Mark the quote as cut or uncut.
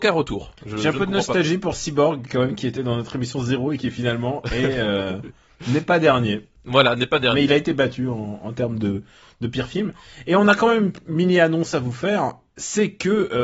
uncut